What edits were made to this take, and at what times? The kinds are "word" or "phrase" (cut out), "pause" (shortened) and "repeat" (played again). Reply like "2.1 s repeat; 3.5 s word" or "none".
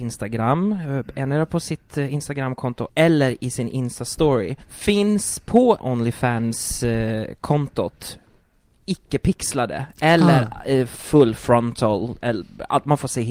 2.9 s word; 4.6 s pause; 5.8 s phrase